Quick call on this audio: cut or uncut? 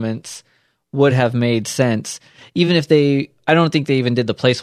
uncut